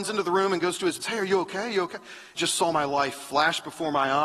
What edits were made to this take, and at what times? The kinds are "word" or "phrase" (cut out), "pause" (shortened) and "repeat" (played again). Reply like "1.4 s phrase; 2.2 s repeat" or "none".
1.0 s phrase; 2.4 s phrase